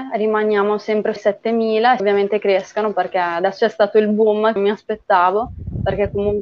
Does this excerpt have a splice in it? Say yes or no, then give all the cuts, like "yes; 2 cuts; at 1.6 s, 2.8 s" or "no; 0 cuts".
yes; 4 cuts; at 1.2 s, 2.0 s, 3.6 s, 4.6 s